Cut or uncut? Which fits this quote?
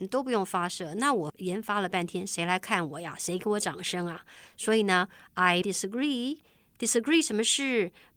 cut